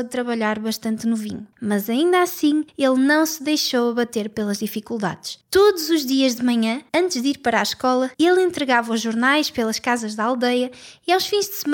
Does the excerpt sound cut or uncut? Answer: cut